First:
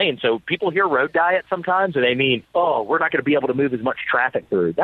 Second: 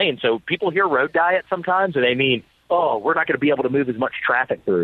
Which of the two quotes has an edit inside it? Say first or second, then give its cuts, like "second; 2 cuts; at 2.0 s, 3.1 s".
first; 1 cut; at 2.4 s